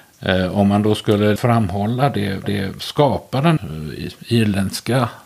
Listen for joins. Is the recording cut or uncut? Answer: cut